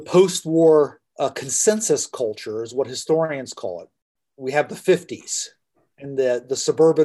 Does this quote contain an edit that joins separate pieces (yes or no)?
no